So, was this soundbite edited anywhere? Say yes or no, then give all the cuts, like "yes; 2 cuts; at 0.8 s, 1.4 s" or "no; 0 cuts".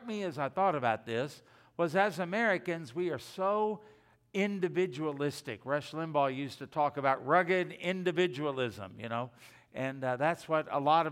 no; 0 cuts